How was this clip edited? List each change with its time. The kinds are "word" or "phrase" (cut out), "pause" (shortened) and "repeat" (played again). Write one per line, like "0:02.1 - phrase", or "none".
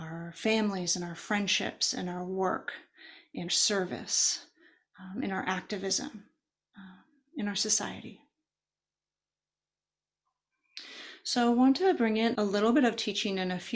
0:03.5 - word
0:12.3 - word